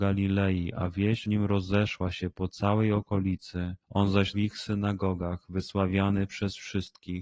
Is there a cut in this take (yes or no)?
yes